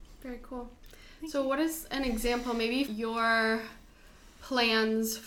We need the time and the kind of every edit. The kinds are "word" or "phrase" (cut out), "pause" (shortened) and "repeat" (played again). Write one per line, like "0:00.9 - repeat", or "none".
0:02.8 - word